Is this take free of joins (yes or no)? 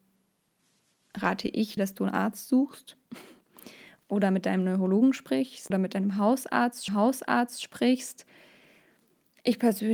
no